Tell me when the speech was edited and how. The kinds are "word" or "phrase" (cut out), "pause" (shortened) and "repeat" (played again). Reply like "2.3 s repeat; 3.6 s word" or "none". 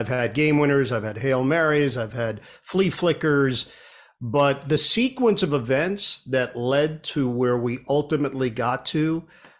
none